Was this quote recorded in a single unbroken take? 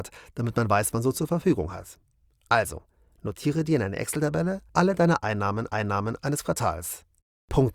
no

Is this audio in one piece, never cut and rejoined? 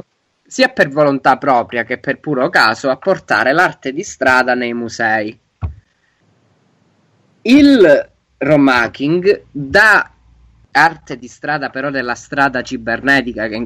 yes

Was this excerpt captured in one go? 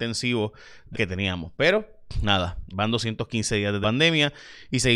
no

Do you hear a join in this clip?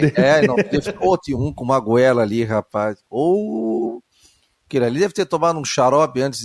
no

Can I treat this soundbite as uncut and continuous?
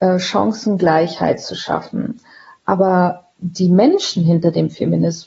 yes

